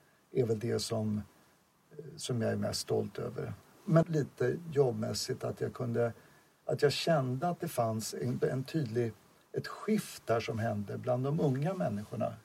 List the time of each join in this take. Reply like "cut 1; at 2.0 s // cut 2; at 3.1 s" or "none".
cut 1; at 4.0 s // cut 2; at 8.4 s